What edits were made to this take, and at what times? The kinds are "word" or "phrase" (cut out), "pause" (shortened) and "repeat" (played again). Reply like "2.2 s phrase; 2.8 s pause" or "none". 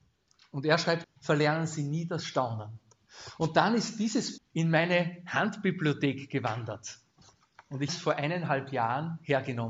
1.0 s word; 4.4 s word; 7.9 s word